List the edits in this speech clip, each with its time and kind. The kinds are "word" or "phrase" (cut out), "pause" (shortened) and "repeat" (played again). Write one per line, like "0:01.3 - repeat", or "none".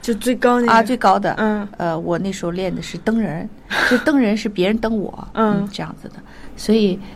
none